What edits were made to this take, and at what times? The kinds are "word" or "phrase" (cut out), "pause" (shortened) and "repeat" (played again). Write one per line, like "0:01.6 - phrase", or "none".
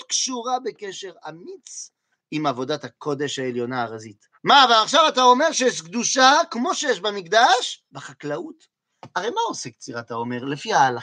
0:04.3 - pause
0:07.9 - pause